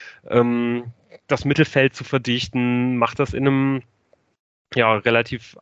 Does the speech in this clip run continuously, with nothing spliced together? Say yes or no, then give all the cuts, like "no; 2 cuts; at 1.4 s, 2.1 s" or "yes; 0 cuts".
yes; 0 cuts